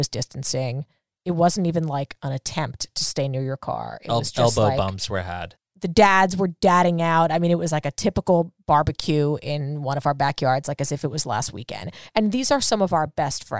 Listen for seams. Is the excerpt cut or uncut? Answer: uncut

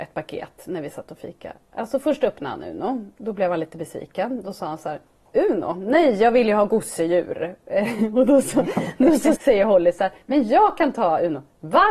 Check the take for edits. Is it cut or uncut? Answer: cut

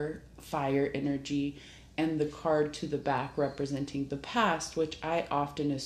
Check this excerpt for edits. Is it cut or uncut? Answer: uncut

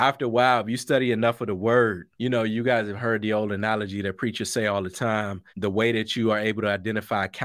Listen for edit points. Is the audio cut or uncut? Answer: cut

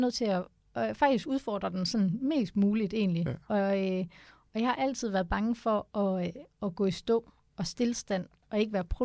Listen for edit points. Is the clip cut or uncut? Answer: uncut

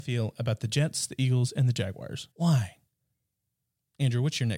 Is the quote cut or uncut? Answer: cut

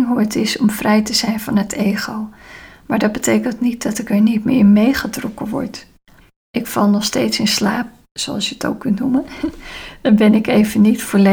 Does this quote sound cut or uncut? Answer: uncut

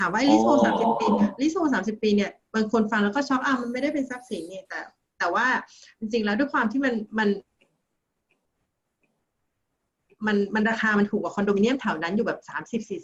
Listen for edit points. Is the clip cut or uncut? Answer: uncut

